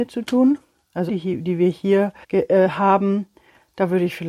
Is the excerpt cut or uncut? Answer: cut